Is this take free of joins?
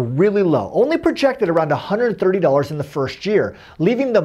yes; 0 cuts

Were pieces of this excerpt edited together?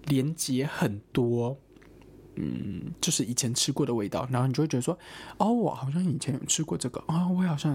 no; 0 cuts

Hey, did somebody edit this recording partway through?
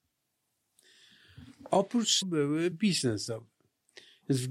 yes; 2 cuts; at 2.2 s, 2.7 s

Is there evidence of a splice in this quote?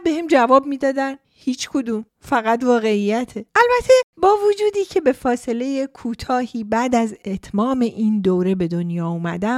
yes; 3 cuts; at 1.2 s, 2.1 s, 3.5 s

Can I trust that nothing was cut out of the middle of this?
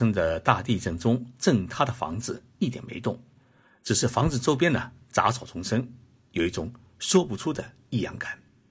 yes; 0 cuts

